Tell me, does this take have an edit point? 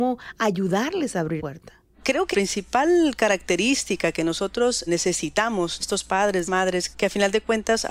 yes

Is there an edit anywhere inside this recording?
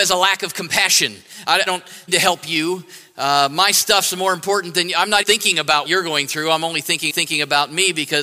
yes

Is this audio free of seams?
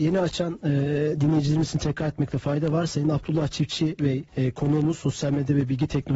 no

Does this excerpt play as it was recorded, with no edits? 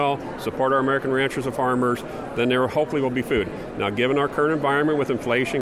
yes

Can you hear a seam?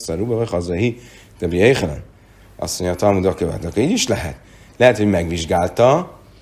no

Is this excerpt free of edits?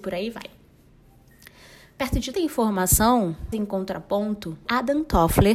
no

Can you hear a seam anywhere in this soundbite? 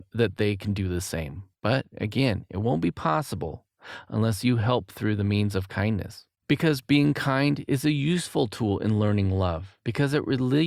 yes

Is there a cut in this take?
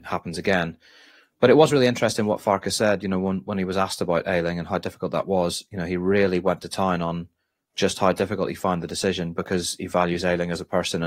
no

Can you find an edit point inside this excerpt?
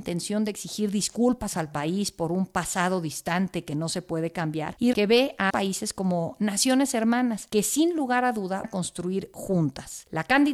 yes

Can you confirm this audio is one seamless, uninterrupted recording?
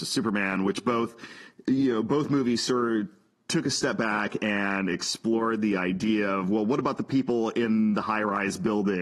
yes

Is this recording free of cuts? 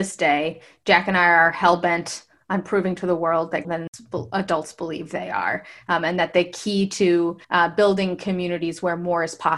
no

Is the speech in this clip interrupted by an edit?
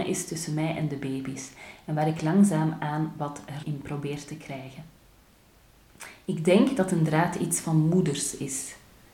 yes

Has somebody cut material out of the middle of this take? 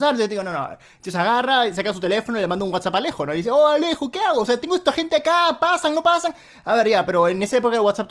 no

